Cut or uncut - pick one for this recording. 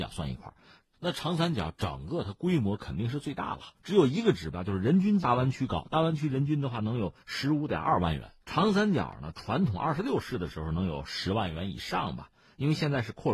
cut